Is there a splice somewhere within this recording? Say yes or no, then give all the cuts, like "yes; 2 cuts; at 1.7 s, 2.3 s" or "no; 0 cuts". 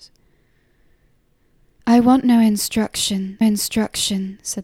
yes; 1 cut; at 3.4 s